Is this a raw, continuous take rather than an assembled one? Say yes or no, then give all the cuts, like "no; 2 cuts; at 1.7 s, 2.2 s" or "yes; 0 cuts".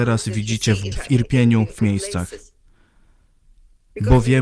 no; 2 cuts; at 0.9 s, 1.8 s